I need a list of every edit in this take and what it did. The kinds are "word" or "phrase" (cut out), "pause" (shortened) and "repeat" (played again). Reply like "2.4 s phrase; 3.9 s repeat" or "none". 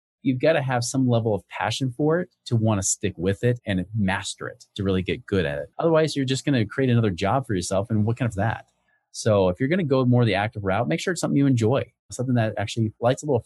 5.7 s pause; 8.3 s phrase